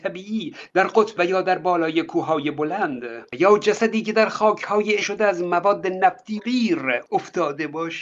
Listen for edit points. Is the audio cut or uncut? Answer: cut